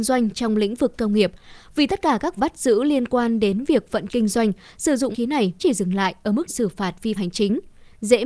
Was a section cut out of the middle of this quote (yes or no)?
yes